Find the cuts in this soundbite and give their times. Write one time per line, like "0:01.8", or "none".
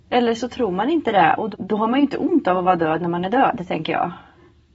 0:01.5